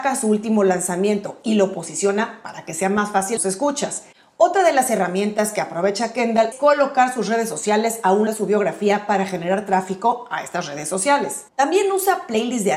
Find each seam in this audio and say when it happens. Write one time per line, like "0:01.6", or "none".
0:03.4
0:06.5
0:08.3
0:11.5